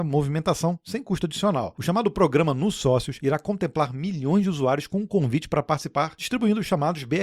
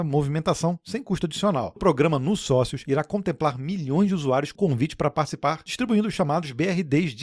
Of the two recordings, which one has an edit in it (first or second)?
second